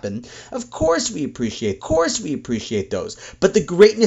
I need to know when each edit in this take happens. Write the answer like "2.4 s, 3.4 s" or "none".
1.8 s